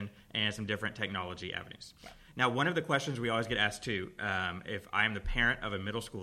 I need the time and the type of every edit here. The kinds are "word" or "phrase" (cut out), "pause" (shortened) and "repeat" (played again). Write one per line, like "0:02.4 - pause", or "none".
none